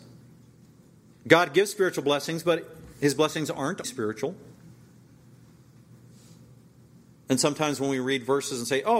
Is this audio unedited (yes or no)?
no